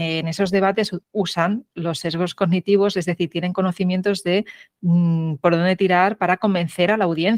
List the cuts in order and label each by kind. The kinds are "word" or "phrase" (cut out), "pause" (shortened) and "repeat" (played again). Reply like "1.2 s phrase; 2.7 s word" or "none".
1.0 s pause